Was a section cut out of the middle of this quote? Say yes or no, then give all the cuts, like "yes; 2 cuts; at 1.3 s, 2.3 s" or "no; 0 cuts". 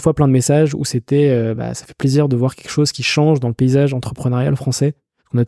no; 0 cuts